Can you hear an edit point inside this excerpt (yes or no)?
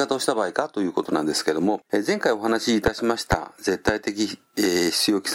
yes